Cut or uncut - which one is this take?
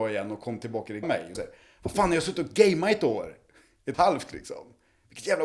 cut